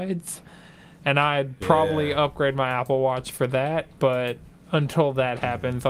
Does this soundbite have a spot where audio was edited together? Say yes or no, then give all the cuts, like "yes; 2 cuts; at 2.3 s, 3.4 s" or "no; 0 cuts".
no; 0 cuts